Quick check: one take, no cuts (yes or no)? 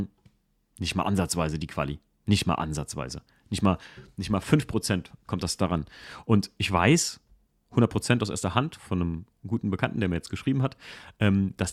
yes